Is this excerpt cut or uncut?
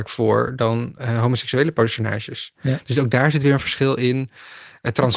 uncut